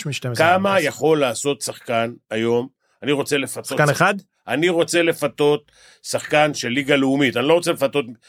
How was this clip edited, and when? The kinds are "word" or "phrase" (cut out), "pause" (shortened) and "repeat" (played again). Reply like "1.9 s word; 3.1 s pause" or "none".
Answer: none